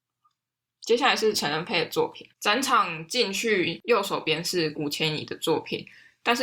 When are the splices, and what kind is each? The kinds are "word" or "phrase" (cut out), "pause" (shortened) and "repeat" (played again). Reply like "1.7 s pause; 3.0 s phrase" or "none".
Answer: 2.3 s pause